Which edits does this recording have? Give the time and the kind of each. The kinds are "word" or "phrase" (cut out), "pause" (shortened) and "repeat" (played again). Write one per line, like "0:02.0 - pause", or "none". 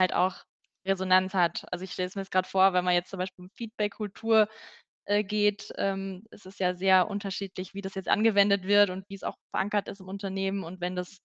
none